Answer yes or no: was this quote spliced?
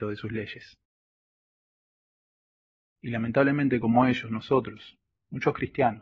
no